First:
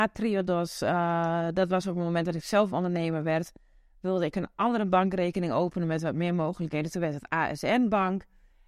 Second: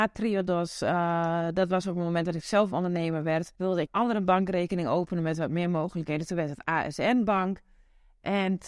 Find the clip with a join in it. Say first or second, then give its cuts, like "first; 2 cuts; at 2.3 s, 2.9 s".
second; 2 cuts; at 3.5 s, 3.9 s